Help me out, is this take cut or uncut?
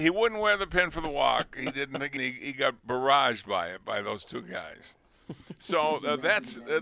cut